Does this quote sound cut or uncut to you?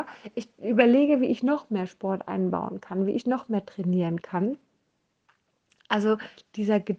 uncut